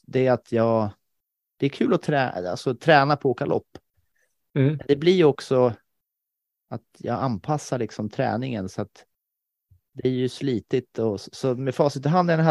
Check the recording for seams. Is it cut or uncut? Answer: uncut